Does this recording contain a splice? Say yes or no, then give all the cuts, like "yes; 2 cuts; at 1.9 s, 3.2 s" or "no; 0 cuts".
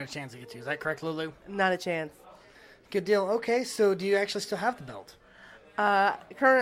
no; 0 cuts